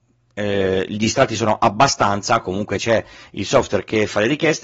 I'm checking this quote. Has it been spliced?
no; 0 cuts

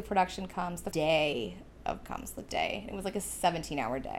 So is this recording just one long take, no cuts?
no; 3 cuts; at 0.9 s, 2.0 s, 2.5 s

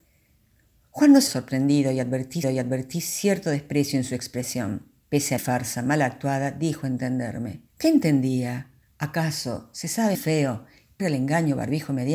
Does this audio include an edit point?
yes; 8 cuts; at 1.3 s, 2.4 s, 5.0 s, 5.4 s, 7.7 s, 8.8 s, 10.1 s, 11.0 s

